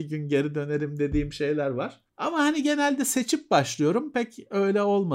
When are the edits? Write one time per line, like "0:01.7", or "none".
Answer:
0:02.1